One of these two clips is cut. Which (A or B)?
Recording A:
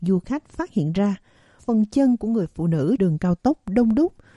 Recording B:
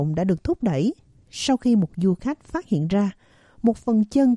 A